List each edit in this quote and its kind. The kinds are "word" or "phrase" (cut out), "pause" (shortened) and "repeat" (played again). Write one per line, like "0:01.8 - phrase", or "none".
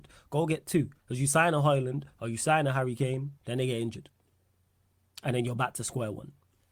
0:03.4 - pause